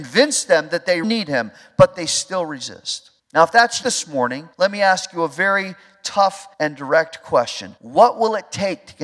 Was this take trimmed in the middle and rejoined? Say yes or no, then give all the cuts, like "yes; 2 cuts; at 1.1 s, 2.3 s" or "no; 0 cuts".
yes; 6 cuts; at 1.0 s, 3.2 s, 3.8 s, 4.5 s, 6.5 s, 7.8 s